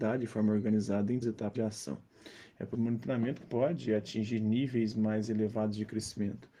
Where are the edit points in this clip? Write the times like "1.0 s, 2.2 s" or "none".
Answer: 1.2 s, 1.5 s, 2.7 s, 3.4 s